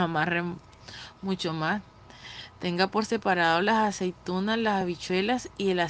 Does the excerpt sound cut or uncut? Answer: uncut